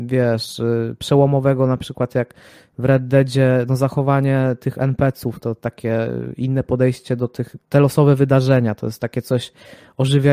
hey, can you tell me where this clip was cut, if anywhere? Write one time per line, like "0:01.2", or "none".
none